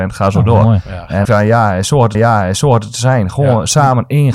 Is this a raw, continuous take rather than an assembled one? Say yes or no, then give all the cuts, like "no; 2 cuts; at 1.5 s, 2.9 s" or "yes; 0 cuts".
no; 2 cuts; at 1.2 s, 2.1 s